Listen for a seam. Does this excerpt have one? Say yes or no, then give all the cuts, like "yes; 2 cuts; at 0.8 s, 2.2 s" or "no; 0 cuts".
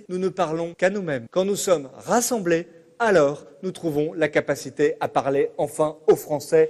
no; 0 cuts